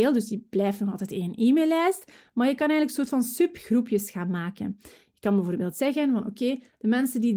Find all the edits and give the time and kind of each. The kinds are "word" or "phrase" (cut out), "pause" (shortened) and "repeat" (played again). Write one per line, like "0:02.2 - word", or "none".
none